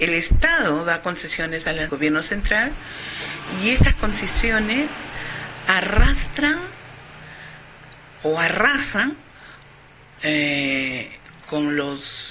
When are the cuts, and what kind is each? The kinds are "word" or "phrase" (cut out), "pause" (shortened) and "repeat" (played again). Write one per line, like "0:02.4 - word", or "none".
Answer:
0:01.9 - phrase